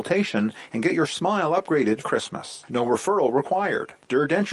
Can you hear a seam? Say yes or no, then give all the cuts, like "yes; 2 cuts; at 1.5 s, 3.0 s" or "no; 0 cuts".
yes; 1 cut; at 2.0 s